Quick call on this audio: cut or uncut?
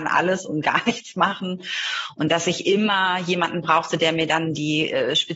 uncut